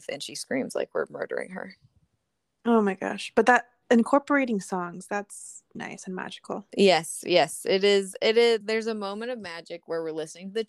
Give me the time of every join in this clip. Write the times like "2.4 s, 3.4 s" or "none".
5.7 s, 6.7 s, 8.6 s